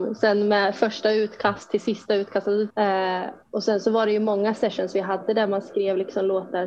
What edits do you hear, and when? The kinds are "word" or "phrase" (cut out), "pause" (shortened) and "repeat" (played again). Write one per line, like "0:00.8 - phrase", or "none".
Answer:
0:02.7 - phrase